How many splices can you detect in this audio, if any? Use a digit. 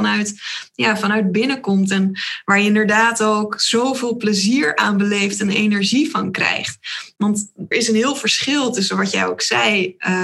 1